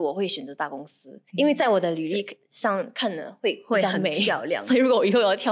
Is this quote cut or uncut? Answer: cut